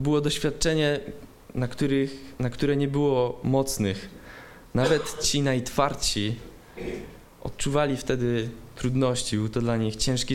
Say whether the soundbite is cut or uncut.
uncut